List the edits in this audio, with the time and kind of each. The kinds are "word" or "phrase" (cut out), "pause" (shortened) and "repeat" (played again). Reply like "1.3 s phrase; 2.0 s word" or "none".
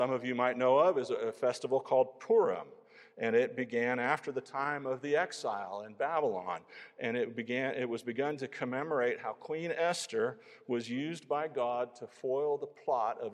none